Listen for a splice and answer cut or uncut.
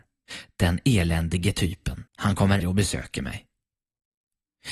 cut